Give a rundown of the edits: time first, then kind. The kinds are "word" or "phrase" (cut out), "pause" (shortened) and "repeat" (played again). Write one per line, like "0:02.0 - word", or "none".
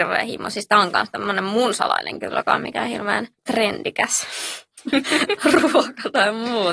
0:02.2 - phrase
0:03.4 - word